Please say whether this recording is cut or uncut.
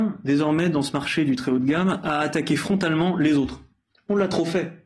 uncut